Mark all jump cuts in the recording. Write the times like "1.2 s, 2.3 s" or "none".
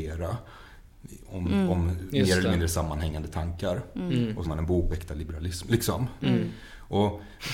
4.4 s, 4.9 s